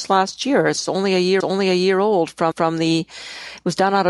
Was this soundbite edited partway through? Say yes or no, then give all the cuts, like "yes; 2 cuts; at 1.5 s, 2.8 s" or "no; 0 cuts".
yes; 2 cuts; at 1.4 s, 2.5 s